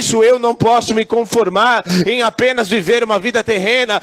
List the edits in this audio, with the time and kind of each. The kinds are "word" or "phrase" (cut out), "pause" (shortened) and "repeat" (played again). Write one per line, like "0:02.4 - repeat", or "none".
none